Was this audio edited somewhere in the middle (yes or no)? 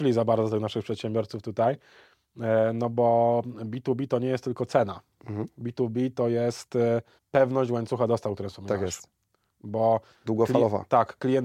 yes